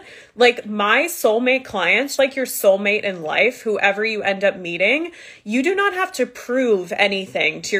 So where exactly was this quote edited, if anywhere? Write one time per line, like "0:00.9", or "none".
0:02.2